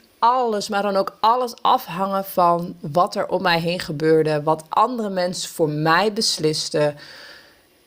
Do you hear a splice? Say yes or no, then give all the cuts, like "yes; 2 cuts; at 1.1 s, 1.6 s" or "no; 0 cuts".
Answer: no; 0 cuts